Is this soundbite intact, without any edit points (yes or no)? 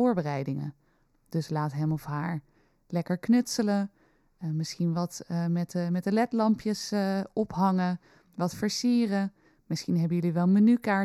yes